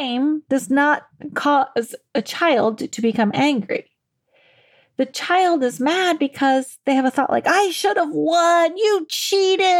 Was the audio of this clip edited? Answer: no; 0 cuts

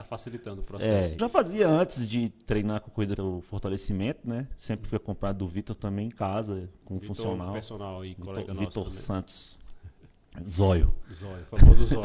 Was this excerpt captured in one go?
no; 2 cuts; at 1.2 s, 3.2 s

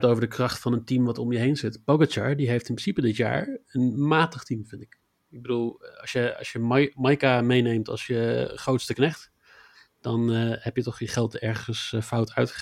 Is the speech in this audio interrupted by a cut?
no; 0 cuts

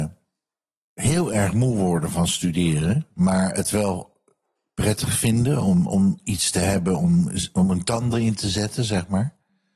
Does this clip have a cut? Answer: no; 0 cuts

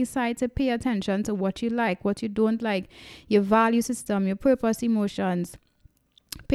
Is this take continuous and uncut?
yes; 0 cuts

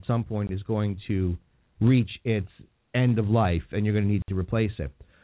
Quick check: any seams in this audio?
no; 0 cuts

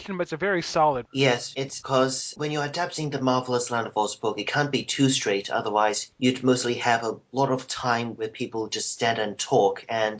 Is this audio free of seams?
yes; 0 cuts

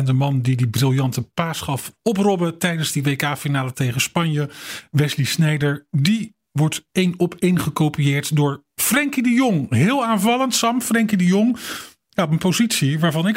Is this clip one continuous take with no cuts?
yes; 0 cuts

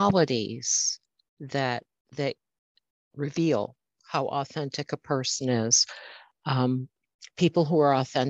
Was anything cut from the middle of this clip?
no; 0 cuts

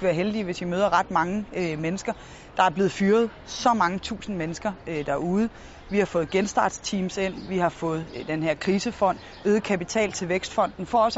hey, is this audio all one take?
yes; 0 cuts

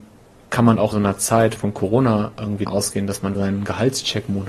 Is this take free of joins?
no; 4 cuts; at 0.9 s, 1.6 s, 2.7 s, 3.3 s

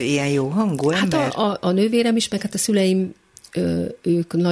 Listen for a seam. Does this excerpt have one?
no; 0 cuts

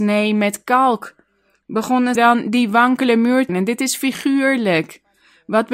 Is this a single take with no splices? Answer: no; 2 cuts; at 2.2 s, 3.5 s

